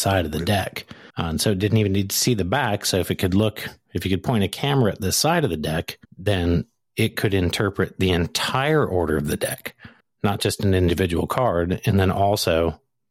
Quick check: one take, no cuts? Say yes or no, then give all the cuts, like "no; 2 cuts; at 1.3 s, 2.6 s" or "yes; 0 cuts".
no; 3 cuts; at 1.1 s, 6.0 s, 10.0 s